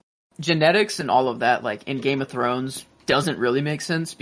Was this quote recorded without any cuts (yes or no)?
yes